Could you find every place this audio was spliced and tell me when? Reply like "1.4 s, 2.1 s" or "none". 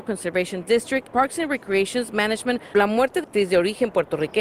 1.1 s, 2.7 s, 3.2 s